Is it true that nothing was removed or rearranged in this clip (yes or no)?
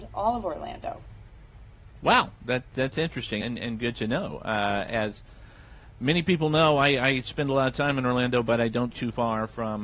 no